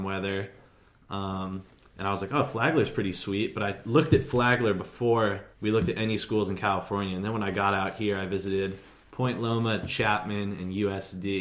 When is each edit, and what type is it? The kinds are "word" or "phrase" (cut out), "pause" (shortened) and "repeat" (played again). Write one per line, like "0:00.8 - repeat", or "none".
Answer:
0:05.5 - pause